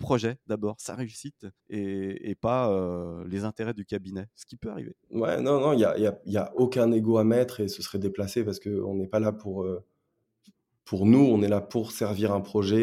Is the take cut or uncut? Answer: cut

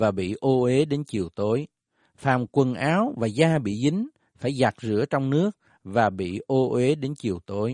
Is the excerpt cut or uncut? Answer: uncut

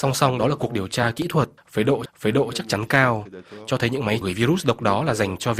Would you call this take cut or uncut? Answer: cut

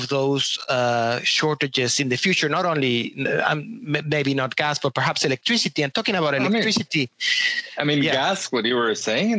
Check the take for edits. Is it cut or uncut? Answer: uncut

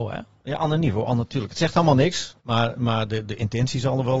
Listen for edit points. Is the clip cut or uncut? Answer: cut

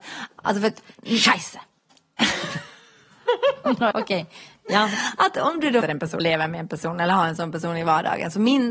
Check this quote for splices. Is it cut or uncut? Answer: cut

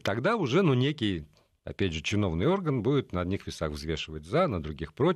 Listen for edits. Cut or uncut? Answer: uncut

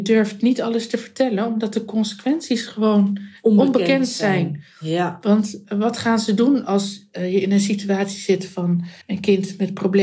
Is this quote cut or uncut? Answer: cut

